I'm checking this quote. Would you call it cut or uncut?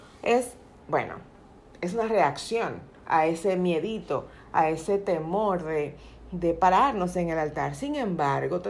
uncut